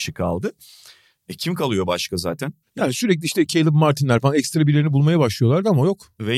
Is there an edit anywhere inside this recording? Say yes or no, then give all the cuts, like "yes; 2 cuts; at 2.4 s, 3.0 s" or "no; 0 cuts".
yes; 1 cut; at 2.6 s